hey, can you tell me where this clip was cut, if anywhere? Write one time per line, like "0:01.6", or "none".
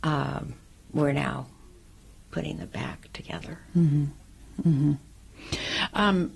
none